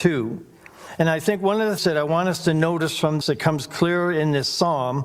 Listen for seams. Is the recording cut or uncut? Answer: cut